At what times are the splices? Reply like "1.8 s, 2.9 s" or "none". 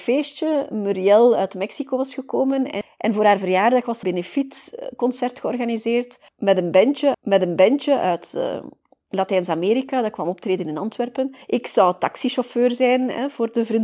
4.0 s, 7.1 s, 11.4 s